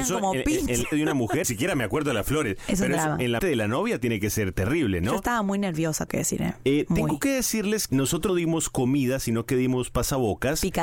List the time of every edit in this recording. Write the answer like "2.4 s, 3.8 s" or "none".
0.9 s, 1.4 s, 3.4 s, 6.1 s, 7.9 s, 8.3 s